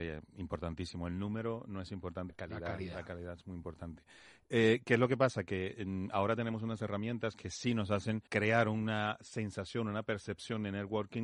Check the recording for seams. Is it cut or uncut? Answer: cut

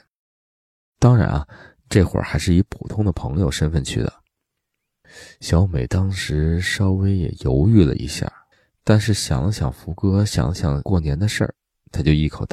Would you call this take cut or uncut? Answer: cut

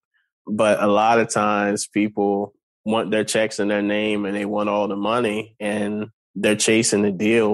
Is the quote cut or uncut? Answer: uncut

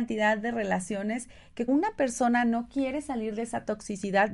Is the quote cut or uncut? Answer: cut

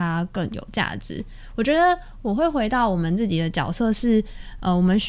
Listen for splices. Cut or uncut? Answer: uncut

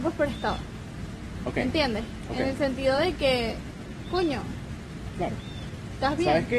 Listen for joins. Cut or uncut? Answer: uncut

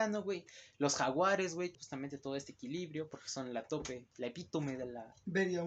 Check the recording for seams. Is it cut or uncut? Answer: cut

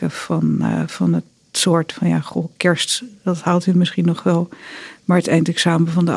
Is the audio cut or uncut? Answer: uncut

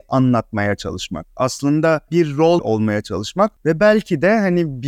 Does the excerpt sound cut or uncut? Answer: cut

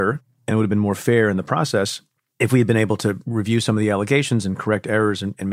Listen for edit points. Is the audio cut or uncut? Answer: uncut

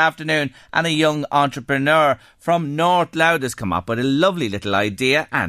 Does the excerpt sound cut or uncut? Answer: uncut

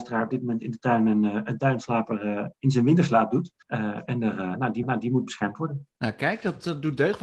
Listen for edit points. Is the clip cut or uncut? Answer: cut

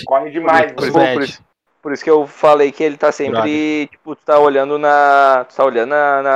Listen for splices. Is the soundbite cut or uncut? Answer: cut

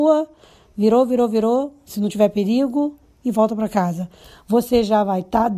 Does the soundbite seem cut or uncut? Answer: uncut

